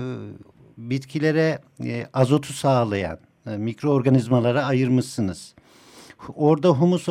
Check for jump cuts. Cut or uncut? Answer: uncut